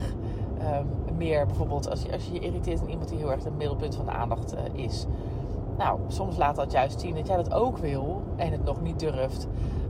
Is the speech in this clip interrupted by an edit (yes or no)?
no